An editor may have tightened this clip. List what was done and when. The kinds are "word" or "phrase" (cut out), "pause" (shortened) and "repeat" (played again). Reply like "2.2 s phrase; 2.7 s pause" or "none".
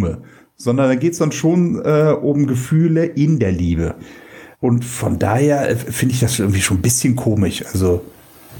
4.5 s pause